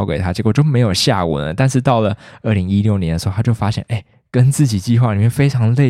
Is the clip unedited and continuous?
yes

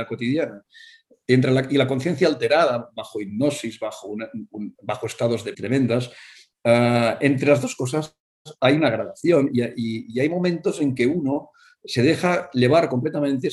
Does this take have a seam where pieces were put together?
yes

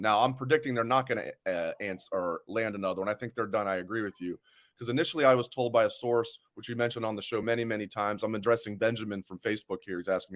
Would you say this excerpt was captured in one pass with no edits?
yes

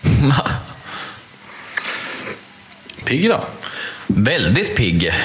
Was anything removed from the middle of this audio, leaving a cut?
yes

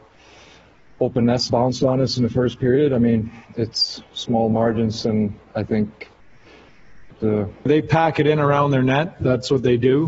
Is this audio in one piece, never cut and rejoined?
no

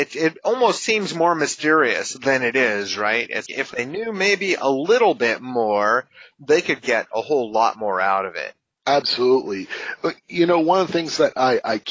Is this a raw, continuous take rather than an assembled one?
no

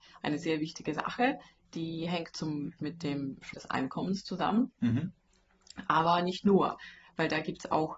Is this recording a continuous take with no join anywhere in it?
no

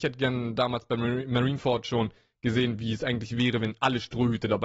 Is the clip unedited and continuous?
yes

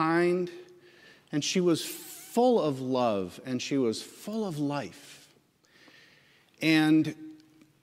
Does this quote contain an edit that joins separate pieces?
no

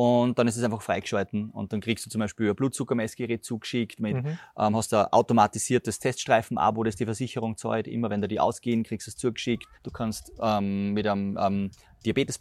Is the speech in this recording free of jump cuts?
no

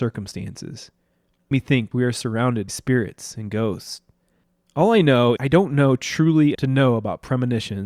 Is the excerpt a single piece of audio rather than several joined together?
no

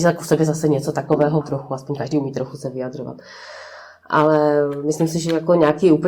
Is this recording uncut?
no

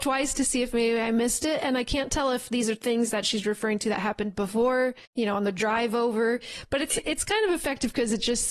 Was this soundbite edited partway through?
yes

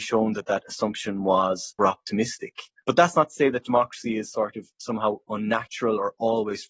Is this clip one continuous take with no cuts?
no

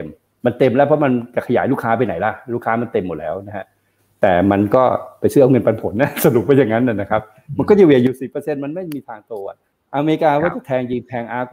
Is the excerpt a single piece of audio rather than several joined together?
yes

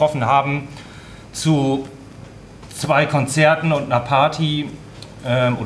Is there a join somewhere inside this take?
no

